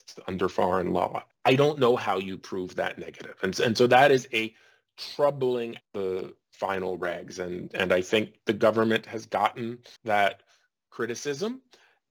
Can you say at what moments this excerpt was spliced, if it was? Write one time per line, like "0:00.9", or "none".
0:01.3
0:05.8
0:10.0